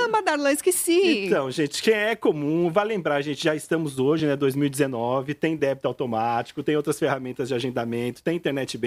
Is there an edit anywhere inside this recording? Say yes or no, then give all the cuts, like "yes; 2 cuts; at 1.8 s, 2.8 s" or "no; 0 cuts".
no; 0 cuts